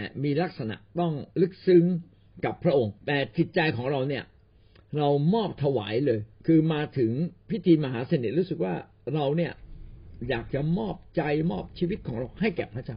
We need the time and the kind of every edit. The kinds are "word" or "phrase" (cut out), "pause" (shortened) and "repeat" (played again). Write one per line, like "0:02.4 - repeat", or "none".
0:01.3 - pause
0:03.0 - pause
0:06.3 - pause
0:07.4 - pause